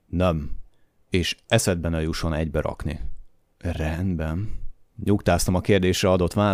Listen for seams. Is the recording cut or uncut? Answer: uncut